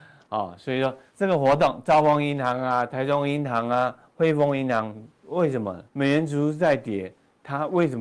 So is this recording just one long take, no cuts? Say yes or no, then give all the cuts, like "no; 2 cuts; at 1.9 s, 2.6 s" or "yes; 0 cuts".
no; 2 cuts; at 1.1 s, 5.9 s